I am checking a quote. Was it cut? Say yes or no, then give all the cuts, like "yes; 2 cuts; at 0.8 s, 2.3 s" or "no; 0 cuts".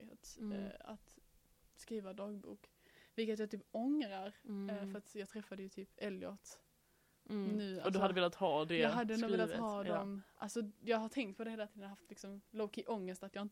no; 0 cuts